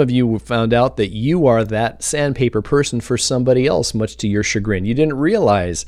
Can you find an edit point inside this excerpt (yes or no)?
no